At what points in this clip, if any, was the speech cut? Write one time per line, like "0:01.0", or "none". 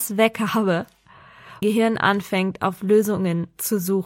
0:01.6